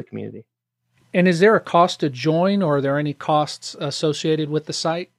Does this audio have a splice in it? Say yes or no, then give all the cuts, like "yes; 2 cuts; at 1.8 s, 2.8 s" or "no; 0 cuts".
no; 0 cuts